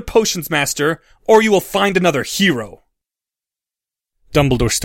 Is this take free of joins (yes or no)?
yes